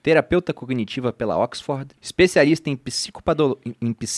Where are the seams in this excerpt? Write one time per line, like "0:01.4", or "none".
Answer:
0:02.0

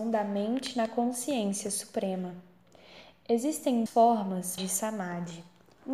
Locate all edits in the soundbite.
0:03.9
0:04.6

